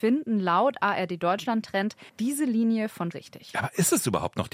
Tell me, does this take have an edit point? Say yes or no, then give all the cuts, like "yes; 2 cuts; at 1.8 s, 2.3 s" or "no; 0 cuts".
yes; 2 cuts; at 2.1 s, 3.1 s